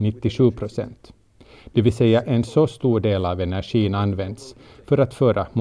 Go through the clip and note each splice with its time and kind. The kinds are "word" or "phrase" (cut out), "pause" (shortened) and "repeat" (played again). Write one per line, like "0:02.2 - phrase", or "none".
none